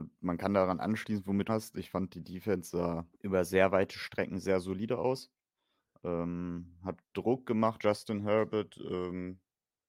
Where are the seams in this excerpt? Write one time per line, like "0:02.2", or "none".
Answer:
0:01.5
0:03.1
0:07.0
0:07.8